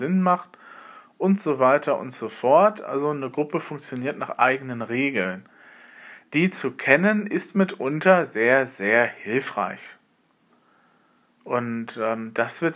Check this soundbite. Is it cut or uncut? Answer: uncut